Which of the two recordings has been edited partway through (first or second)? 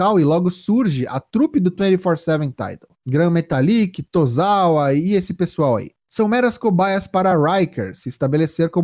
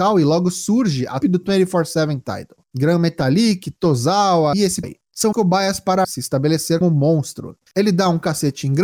second